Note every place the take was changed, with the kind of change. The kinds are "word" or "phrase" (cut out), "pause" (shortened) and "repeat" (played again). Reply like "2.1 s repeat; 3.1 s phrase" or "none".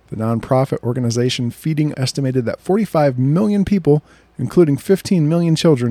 1.9 s word